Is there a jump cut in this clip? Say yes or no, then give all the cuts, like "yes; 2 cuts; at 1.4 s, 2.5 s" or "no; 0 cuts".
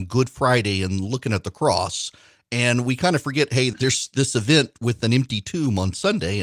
yes; 1 cut; at 3.7 s